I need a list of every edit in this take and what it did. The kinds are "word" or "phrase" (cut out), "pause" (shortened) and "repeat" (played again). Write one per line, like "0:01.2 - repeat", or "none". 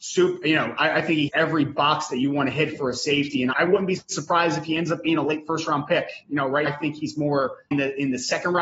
0:01.3 - word
0:03.5 - word
0:06.7 - word
0:07.7 - word